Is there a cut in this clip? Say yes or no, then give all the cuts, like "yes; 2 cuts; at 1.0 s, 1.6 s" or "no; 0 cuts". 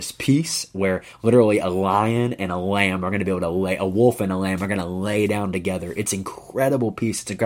no; 0 cuts